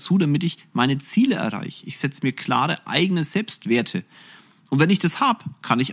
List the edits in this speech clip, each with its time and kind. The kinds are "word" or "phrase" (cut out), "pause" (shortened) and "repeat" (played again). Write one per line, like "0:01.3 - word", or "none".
none